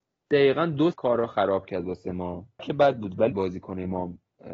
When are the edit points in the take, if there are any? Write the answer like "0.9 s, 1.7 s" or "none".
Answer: 0.9 s, 2.6 s, 3.3 s